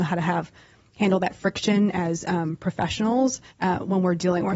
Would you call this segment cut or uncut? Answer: cut